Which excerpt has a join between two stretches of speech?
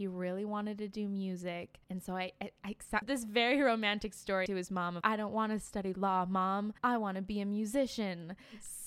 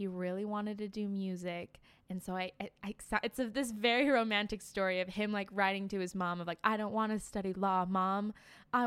first; 5 cuts; at 1.8 s, 3.0 s, 4.5 s, 5.0 s, 6.8 s

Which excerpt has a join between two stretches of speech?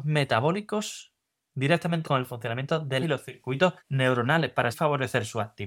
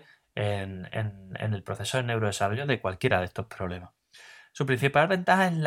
first; 4 cuts; at 2.0 s, 3.0 s, 3.8 s, 4.7 s

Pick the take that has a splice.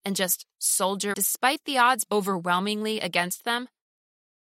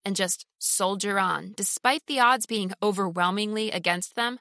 first; 2 cuts; at 1.1 s, 2.1 s

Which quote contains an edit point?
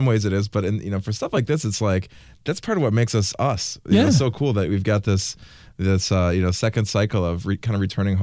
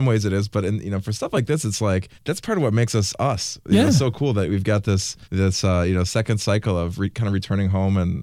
second; 2 cuts; at 2.2 s, 5.2 s

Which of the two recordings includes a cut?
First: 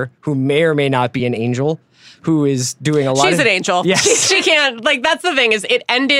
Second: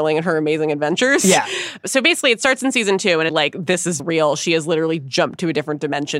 second; 2 cuts; at 3.3 s, 4.0 s

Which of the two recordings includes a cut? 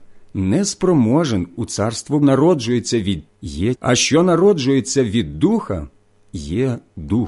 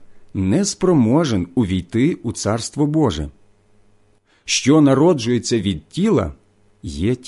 first; 4 cuts; at 1.5 s, 2.2 s, 3.3 s, 3.7 s

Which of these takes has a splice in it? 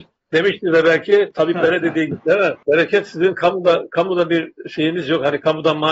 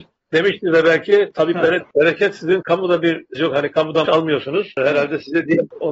second; 4 cuts; at 1.8 s, 2.6 s, 3.4 s, 4.1 s

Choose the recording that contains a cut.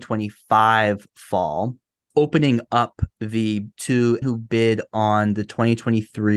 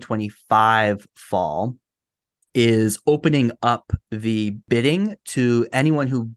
first; 3 cuts; at 2.1 s, 3.7 s, 4.2 s

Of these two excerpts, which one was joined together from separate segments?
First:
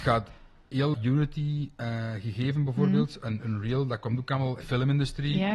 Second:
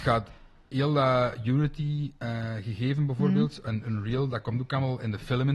first; 2 cuts; at 0.9 s, 4.6 s

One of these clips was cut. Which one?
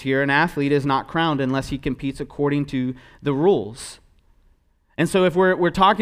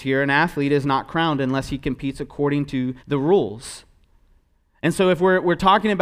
second; 1 cut; at 3.0 s

